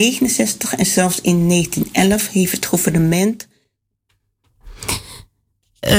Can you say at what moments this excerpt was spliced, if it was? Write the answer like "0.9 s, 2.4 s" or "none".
none